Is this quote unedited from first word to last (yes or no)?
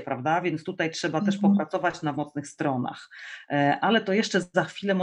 no